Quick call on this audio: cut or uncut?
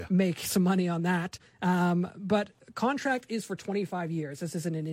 uncut